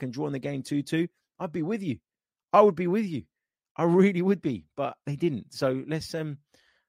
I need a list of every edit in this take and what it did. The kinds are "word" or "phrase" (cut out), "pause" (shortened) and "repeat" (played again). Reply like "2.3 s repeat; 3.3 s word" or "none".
none